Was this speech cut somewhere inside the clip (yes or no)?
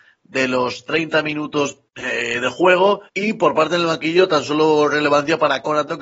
yes